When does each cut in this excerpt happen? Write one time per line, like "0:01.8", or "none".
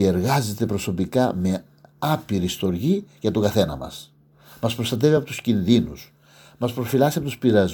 none